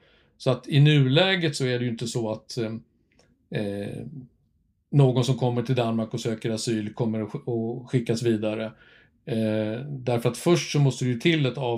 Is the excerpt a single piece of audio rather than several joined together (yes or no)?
yes